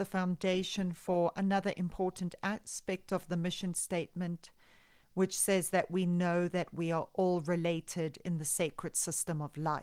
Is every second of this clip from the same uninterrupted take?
yes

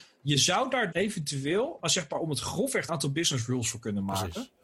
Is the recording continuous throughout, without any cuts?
no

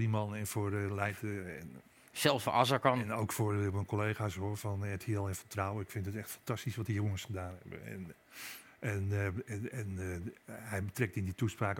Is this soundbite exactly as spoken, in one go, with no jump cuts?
yes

